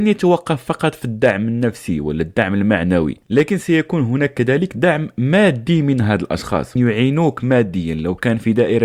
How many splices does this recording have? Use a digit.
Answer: 1